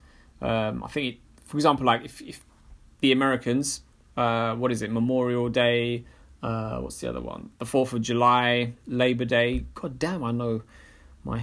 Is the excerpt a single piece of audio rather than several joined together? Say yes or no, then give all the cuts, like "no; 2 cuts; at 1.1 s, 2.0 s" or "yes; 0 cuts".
yes; 0 cuts